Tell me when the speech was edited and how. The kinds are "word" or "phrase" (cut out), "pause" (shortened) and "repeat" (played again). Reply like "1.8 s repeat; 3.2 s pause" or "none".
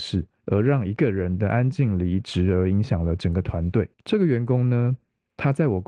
3.9 s pause